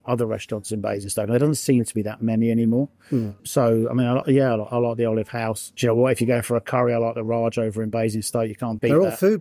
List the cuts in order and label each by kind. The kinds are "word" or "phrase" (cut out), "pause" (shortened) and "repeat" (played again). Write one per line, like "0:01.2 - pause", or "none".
0:04.2 - word